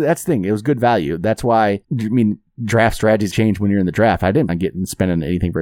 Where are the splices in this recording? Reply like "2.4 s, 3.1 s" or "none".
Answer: 1.8 s, 3.3 s, 4.5 s